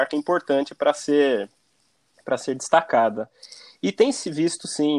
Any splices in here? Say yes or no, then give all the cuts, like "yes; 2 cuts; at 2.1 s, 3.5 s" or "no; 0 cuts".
no; 0 cuts